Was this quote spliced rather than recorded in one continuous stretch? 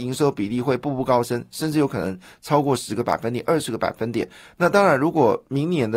no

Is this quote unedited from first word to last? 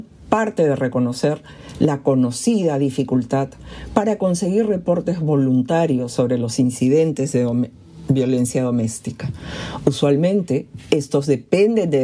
yes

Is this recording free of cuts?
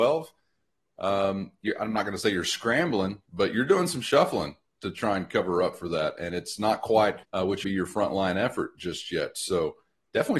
no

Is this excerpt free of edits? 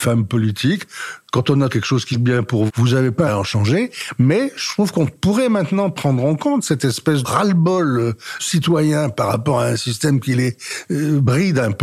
no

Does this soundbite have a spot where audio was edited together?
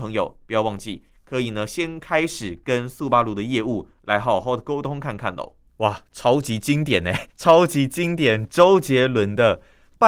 yes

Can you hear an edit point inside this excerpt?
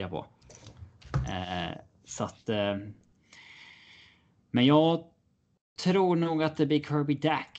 no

